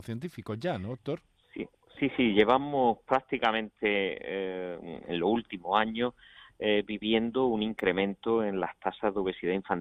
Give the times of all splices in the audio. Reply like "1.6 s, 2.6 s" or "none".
none